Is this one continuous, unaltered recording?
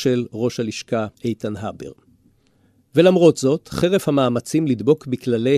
no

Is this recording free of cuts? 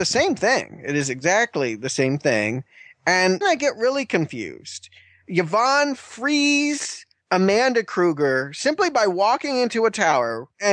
no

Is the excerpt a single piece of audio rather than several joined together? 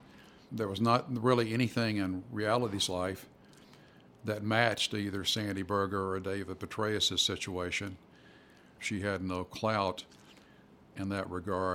yes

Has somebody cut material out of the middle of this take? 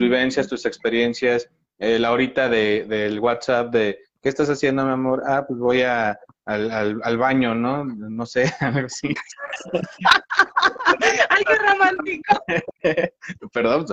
no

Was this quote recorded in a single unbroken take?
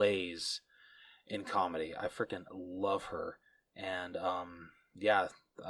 yes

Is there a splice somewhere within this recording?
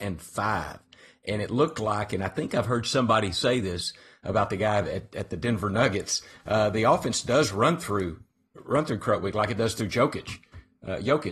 no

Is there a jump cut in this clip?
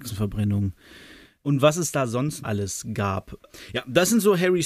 yes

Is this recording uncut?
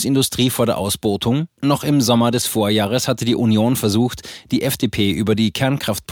no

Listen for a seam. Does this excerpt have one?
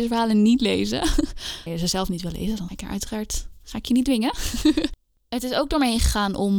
yes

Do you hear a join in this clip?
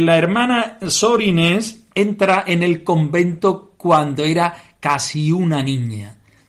no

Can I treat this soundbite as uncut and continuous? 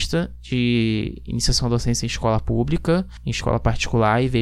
yes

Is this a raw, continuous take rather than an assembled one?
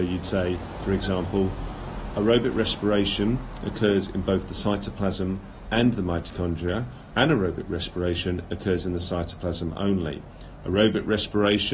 no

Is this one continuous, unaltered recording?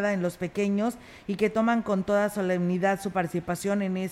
yes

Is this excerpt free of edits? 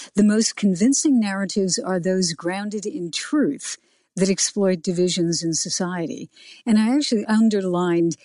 yes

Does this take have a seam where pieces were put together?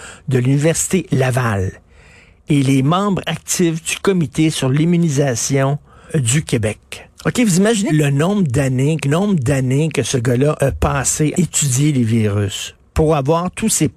yes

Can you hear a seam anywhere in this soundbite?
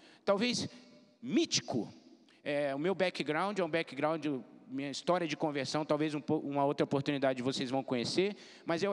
no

